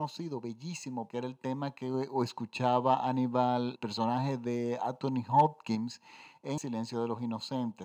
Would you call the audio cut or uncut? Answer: cut